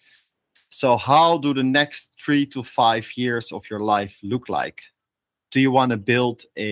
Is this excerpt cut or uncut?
uncut